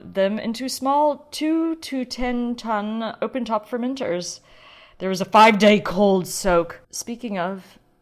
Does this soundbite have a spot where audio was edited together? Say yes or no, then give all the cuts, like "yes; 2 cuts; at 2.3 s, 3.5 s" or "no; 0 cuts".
yes; 1 cut; at 6.8 s